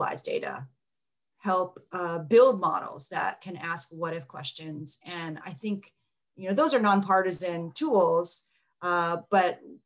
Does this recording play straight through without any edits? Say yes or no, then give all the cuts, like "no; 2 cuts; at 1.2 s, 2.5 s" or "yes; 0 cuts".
yes; 0 cuts